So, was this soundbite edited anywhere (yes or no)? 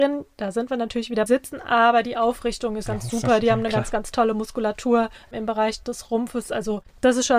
yes